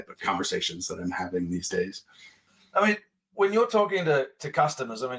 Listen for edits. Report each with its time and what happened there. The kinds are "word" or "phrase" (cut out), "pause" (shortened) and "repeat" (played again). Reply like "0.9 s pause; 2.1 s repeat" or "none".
none